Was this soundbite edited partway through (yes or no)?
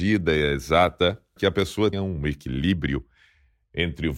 yes